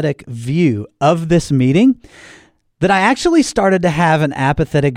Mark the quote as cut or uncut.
uncut